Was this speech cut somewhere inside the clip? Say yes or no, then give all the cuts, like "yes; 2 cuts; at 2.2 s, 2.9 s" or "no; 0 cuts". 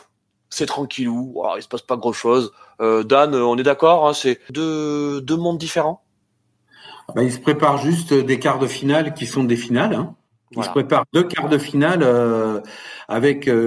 yes; 1 cut; at 10.3 s